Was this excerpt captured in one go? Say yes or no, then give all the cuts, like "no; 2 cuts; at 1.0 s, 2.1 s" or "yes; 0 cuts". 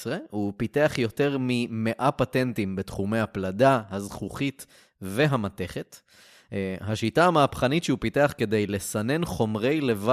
yes; 0 cuts